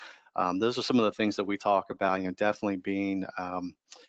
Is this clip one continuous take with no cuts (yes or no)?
yes